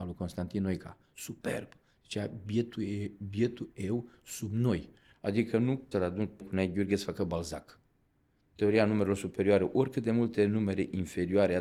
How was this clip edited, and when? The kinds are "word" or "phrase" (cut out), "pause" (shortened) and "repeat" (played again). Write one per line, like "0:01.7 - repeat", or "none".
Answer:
0:05.9 - word
0:06.4 - word